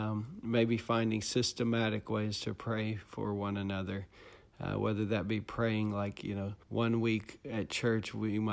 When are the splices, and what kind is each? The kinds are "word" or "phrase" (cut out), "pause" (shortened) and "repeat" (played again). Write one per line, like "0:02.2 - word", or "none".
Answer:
0:06.6 - pause